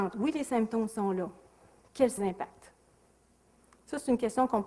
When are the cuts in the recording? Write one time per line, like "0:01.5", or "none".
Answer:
0:02.2